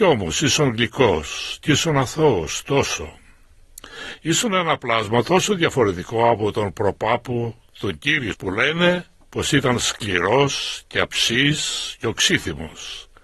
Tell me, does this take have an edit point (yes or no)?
yes